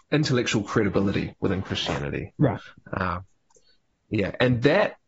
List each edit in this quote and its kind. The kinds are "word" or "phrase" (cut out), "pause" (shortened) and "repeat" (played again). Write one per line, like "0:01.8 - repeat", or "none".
none